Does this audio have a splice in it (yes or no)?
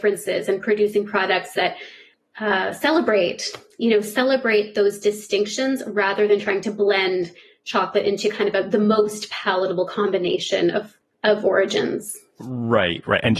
no